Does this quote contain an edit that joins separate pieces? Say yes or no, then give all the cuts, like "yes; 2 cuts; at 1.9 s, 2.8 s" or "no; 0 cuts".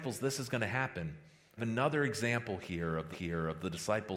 yes; 2 cuts; at 1.6 s, 3.1 s